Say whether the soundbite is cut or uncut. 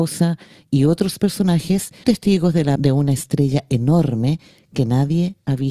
cut